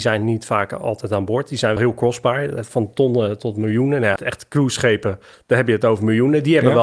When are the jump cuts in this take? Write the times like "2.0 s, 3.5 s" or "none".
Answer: 1.8 s, 3.4 s, 4.2 s, 5.3 s